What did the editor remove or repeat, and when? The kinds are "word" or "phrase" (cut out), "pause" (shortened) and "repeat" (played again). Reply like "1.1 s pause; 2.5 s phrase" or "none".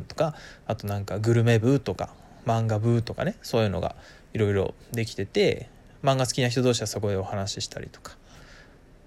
none